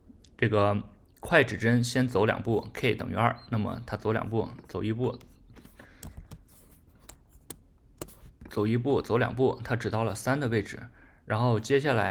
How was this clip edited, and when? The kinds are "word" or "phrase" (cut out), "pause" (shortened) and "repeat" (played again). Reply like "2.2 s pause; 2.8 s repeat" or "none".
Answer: none